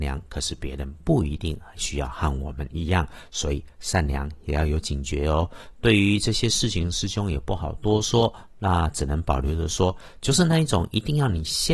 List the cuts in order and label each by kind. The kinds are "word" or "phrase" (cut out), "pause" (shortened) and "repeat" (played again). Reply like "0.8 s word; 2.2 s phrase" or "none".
none